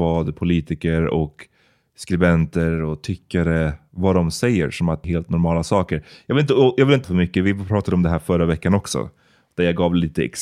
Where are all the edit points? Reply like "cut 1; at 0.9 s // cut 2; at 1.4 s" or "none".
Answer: cut 1; at 5.0 s // cut 2; at 7.0 s